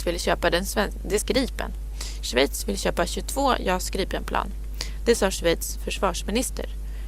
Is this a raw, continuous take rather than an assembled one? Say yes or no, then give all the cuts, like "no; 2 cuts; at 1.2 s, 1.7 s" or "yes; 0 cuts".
no; 1 cut; at 1.2 s